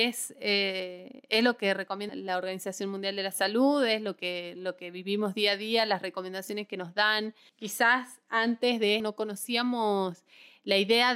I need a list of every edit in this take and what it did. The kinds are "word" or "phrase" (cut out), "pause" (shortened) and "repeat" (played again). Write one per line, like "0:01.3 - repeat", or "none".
0:02.1 - word
0:09.0 - word